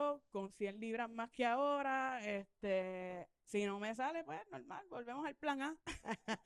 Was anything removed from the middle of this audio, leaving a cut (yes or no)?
yes